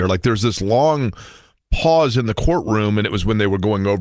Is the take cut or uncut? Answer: uncut